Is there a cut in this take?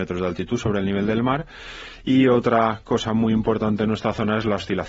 no; 0 cuts

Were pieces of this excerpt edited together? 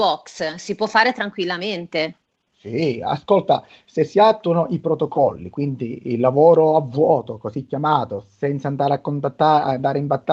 no; 0 cuts

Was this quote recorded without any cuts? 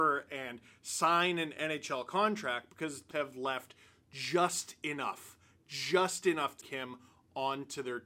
no; 2 cuts; at 3.1 s, 6.6 s

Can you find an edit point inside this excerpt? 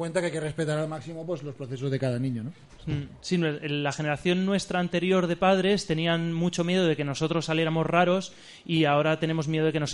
no; 0 cuts

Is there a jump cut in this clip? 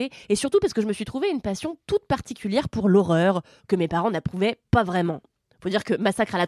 no; 0 cuts

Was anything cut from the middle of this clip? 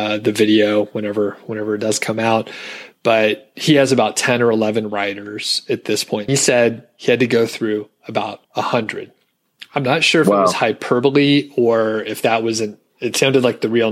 yes; 2 cuts; at 6.3 s, 8.4 s

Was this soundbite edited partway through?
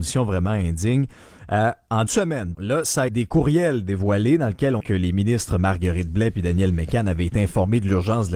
yes; 4 cuts; at 2.1 s, 2.5 s, 3.1 s, 4.8 s

